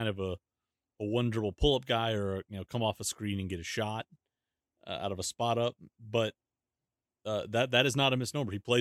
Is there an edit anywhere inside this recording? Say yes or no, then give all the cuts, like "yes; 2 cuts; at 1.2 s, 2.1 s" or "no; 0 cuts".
no; 0 cuts